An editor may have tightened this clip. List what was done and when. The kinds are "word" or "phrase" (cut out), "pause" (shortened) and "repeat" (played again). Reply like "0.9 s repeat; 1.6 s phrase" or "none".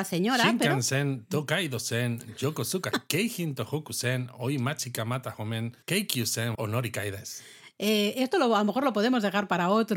2.9 s word; 5.8 s pause; 6.5 s word